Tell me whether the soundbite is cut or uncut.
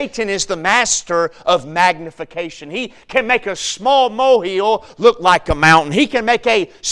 uncut